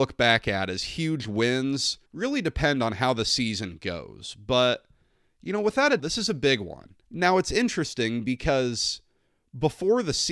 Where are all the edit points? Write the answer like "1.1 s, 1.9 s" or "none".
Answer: 2.1 s, 6.0 s, 7.0 s